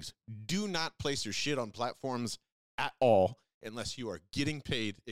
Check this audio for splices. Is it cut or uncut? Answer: uncut